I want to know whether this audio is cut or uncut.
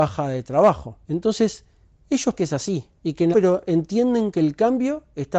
cut